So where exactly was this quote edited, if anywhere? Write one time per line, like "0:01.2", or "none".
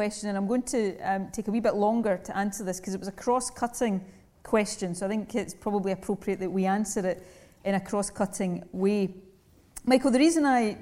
none

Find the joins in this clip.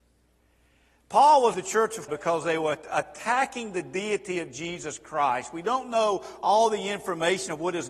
0:01.5
0:02.1

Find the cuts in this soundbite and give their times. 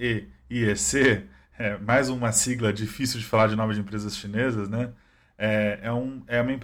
none

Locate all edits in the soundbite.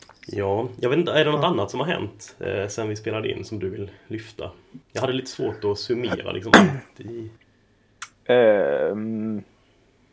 0:04.8
0:07.4

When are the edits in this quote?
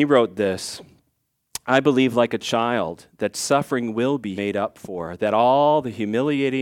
0:04.4

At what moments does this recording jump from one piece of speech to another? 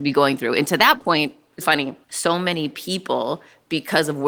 0:01.6
0:02.0

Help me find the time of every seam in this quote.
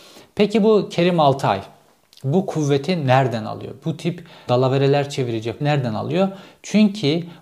0:04.5
0:05.6

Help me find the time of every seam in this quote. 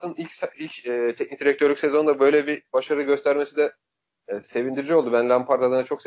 none

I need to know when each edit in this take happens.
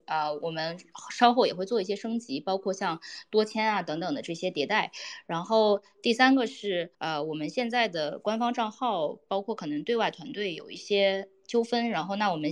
0:06.9

